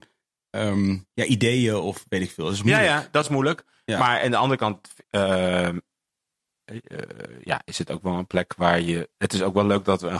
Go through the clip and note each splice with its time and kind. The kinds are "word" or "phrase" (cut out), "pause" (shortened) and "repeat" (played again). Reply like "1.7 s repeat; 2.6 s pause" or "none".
1.1 s pause; 5.0 s pause; 9.1 s pause